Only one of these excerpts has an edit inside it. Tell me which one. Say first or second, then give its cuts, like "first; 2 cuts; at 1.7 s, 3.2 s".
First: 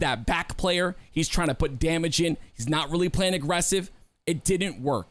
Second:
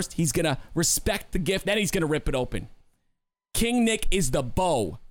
second; 1 cut; at 1.6 s